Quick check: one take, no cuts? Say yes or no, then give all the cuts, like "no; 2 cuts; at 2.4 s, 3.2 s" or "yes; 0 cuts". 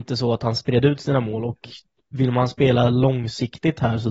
yes; 0 cuts